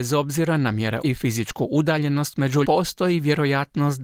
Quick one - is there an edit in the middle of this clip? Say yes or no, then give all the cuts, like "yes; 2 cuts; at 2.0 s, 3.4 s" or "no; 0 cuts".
yes; 2 cuts; at 1.0 s, 2.6 s